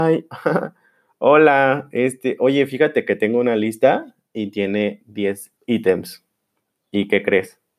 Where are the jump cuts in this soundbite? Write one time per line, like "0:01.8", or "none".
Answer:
0:05.6